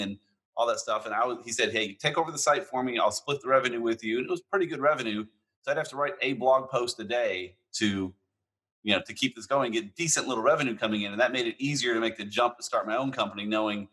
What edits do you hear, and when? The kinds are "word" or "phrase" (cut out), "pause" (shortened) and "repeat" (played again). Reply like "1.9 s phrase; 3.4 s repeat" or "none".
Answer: none